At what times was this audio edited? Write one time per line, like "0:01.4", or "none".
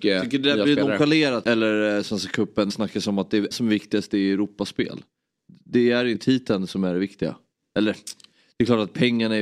0:01.4
0:02.7
0:03.5
0:06.1